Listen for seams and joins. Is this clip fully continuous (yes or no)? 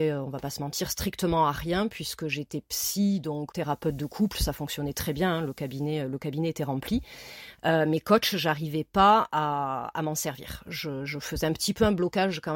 no